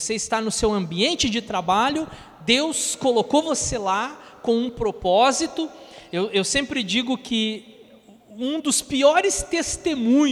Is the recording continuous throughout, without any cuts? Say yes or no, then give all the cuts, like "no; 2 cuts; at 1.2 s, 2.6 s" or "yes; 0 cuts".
yes; 0 cuts